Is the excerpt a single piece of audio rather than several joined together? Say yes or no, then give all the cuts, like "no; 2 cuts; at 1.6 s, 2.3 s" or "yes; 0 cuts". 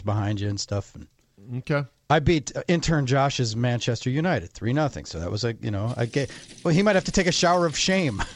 yes; 0 cuts